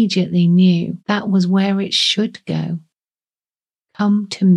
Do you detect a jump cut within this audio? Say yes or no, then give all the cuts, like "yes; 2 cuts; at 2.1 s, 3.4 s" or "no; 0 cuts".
yes; 1 cut; at 1.0 s